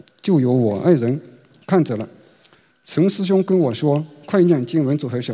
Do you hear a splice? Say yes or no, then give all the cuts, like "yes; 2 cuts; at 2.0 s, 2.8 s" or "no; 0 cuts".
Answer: no; 0 cuts